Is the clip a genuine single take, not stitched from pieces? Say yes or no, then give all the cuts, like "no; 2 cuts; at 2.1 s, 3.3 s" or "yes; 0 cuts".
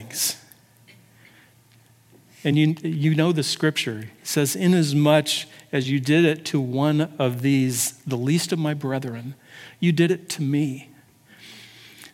yes; 0 cuts